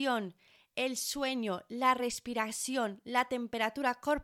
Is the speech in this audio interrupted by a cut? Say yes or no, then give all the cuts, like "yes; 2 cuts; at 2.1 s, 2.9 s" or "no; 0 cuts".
no; 0 cuts